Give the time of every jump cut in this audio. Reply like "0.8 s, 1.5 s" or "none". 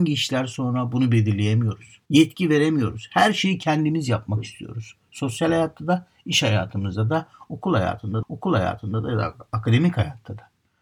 2.1 s, 8.2 s